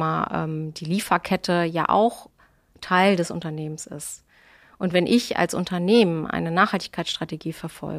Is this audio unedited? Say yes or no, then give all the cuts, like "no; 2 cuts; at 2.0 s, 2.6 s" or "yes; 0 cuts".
yes; 0 cuts